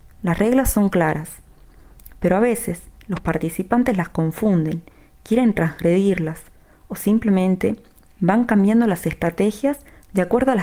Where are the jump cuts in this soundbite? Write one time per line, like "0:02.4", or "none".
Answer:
none